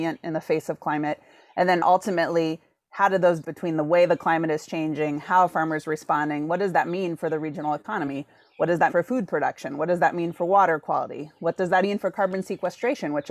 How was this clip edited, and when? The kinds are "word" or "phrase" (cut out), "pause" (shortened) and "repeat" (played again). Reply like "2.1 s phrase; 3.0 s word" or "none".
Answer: 3.4 s word; 8.9 s word; 11.8 s word